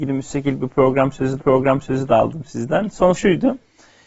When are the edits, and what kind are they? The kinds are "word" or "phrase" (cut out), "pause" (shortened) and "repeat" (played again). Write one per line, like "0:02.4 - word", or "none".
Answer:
0:01.4 - repeat
0:03.1 - word